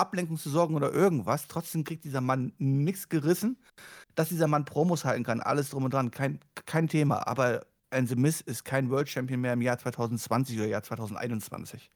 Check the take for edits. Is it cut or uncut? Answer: uncut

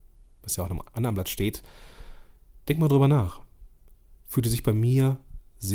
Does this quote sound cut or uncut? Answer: uncut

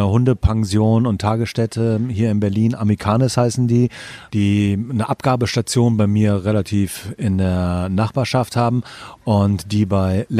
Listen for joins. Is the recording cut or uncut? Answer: uncut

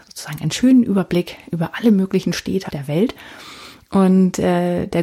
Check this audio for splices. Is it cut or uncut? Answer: cut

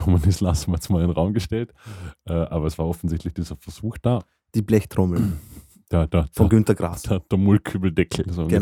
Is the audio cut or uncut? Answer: uncut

